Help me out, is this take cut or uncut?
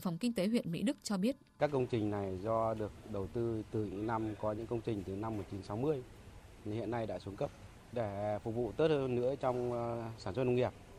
uncut